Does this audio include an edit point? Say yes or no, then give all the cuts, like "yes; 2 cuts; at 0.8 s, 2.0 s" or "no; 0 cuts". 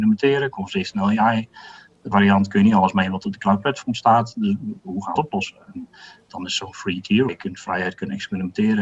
yes; 3 cuts; at 2.1 s, 5.2 s, 7.3 s